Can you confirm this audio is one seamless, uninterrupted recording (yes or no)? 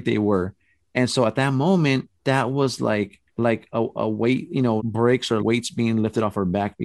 no